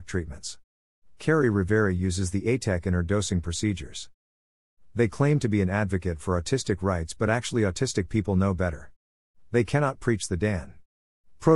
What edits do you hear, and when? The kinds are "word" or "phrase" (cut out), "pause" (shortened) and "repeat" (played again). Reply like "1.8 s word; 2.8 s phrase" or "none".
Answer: none